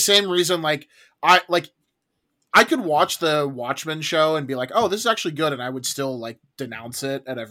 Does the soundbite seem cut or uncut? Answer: uncut